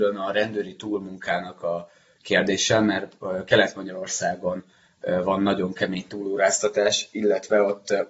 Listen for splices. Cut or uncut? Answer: uncut